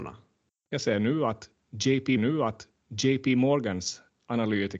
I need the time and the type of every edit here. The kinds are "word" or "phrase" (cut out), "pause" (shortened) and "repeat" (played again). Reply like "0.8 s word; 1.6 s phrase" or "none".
2.2 s repeat